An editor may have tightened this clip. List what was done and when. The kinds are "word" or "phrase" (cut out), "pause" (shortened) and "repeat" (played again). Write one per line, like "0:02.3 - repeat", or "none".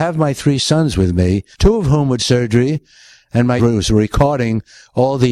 0:01.5 - pause
0:02.2 - word
0:03.6 - phrase